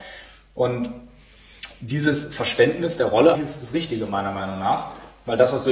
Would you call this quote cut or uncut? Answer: cut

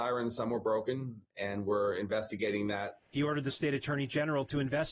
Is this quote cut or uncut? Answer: cut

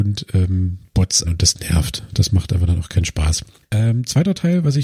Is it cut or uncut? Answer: cut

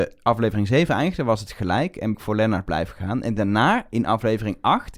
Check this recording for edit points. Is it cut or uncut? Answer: cut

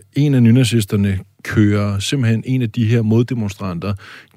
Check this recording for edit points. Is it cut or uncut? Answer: uncut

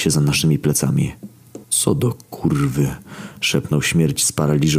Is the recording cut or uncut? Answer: cut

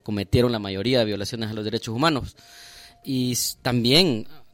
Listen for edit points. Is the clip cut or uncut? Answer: uncut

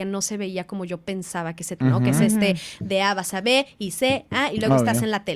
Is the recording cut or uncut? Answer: cut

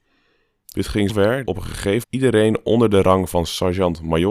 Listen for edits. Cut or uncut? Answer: cut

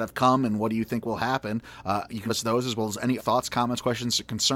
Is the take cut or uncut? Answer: cut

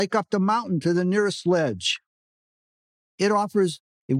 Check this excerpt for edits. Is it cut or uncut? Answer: uncut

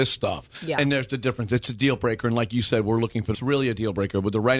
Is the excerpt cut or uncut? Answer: cut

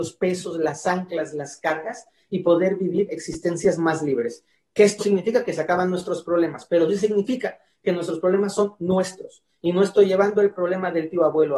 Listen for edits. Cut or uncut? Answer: cut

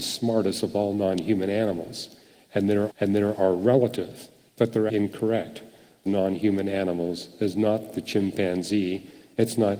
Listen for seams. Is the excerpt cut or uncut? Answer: cut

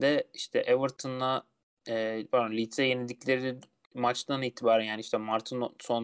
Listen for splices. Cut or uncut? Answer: uncut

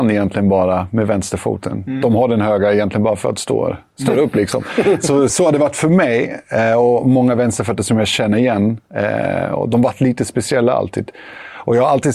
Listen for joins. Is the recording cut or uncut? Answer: cut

